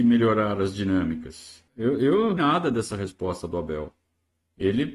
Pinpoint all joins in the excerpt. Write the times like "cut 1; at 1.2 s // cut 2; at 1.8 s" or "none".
cut 1; at 1.7 s // cut 2; at 2.4 s